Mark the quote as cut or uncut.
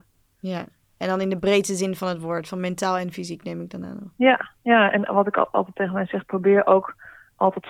uncut